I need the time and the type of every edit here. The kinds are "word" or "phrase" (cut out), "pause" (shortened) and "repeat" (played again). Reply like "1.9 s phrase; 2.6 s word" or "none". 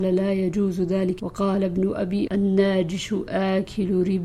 1.2 s word; 2.3 s word